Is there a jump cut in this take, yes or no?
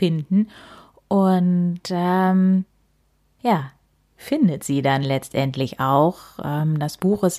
no